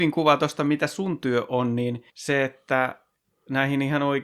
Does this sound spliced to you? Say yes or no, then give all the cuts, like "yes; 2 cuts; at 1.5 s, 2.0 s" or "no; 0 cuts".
yes; 1 cut; at 2.1 s